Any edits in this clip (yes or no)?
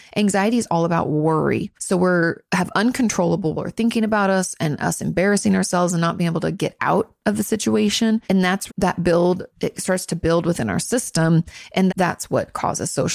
yes